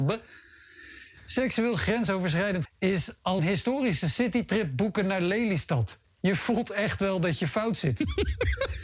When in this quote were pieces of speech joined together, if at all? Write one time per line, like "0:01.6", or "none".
0:02.6
0:03.4